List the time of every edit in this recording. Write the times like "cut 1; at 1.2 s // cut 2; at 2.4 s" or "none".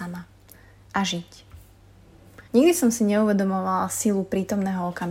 cut 1; at 2.5 s